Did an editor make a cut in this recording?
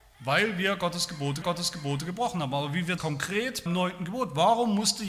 yes; 3 cuts; at 1.4 s, 3.0 s, 3.7 s

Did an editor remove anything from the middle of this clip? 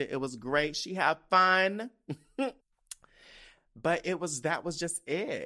yes; 1 cut; at 2.6 s

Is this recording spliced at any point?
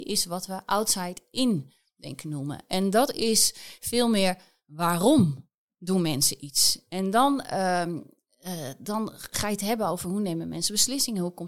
no; 0 cuts

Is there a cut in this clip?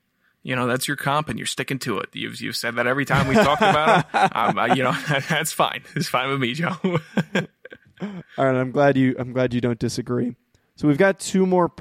no; 0 cuts

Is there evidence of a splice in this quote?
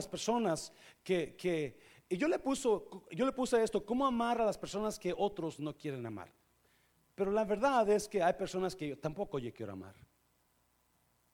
no; 0 cuts

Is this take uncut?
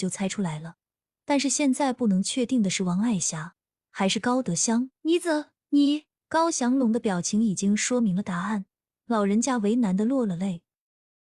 no; 2 cuts; at 5.0 s, 6.2 s

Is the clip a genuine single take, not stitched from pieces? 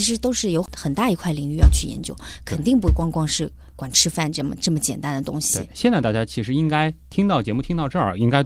yes; 0 cuts

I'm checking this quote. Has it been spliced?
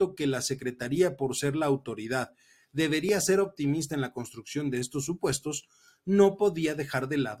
no; 0 cuts

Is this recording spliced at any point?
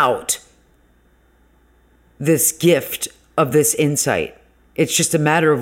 no; 0 cuts

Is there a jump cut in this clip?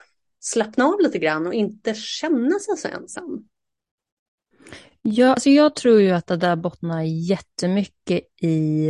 no; 0 cuts

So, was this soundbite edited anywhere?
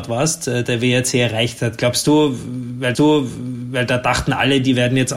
yes; 1 cut; at 2.9 s

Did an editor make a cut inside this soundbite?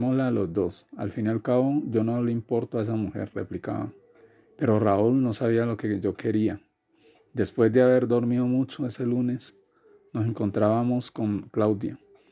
no; 0 cuts

